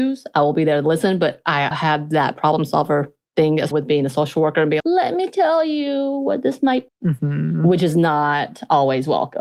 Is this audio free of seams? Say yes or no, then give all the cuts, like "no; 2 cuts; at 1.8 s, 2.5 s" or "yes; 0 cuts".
no; 4 cuts; at 1.7 s, 3.7 s, 4.8 s, 6.9 s